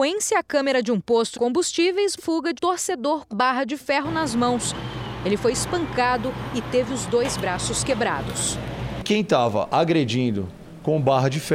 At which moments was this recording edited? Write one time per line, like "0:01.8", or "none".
0:01.3
0:02.2
0:02.6
0:03.3